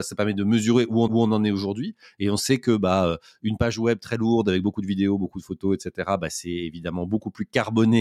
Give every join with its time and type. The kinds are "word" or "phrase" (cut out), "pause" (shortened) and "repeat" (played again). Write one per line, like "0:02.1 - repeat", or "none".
0:01.1 - repeat